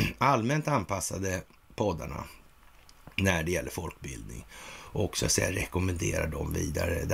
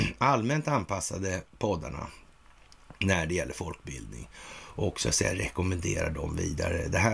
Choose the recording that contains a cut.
second; 1 cut; at 1.5 s

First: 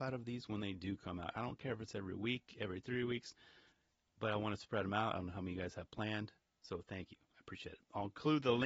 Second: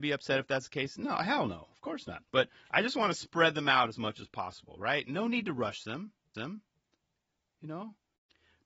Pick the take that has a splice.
second; 2 cuts; at 2.3 s, 6.3 s

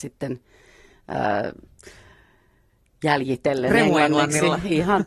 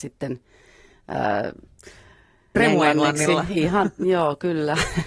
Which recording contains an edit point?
second; 1 cut; at 2.5 s

